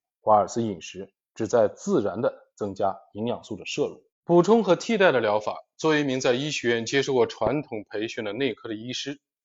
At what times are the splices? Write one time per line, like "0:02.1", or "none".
0:04.1